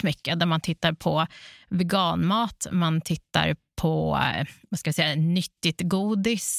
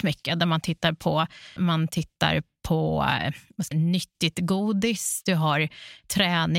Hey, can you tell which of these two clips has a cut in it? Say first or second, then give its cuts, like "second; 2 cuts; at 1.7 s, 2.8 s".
second; 2 cuts; at 1.6 s, 3.7 s